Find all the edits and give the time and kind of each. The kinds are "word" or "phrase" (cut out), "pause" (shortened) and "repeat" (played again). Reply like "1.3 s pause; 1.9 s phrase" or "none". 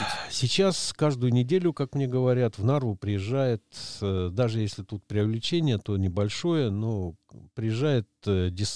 none